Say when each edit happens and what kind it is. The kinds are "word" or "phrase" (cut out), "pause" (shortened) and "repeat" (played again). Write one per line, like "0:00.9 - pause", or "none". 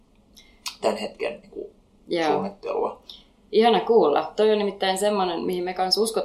none